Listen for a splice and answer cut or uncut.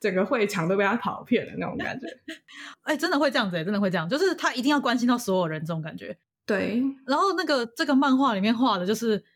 uncut